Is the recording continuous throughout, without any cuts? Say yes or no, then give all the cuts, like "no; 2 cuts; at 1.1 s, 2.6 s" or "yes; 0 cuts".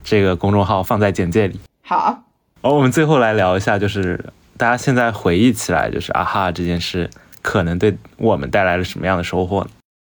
yes; 0 cuts